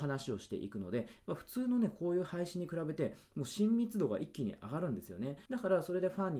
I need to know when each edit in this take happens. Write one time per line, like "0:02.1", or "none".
0:05.5